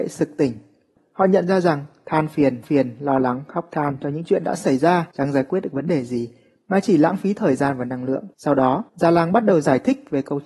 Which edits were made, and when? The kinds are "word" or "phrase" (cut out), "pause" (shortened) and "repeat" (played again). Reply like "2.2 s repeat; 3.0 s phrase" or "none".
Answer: 2.6 s repeat; 5.1 s pause; 8.3 s pause; 8.9 s pause